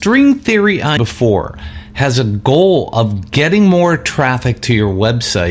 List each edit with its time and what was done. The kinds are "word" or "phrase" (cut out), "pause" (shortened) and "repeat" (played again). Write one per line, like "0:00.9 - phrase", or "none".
0:01.0 - word